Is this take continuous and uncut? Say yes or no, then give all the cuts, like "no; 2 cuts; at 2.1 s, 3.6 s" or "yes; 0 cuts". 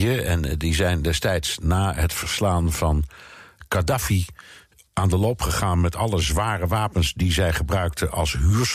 yes; 0 cuts